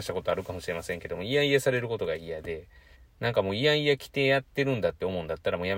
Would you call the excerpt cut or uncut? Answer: cut